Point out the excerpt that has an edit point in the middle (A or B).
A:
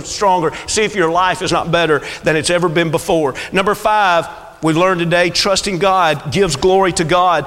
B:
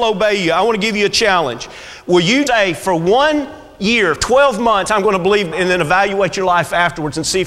B